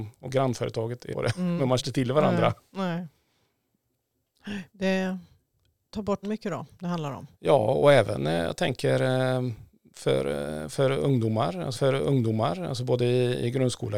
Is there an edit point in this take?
yes; 6 cuts; at 1.1 s, 1.8 s, 4.7 s, 6.2 s, 7.3 s, 11.7 s

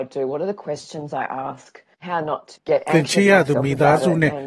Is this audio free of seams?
no; 2 cuts; at 1.9 s, 2.5 s

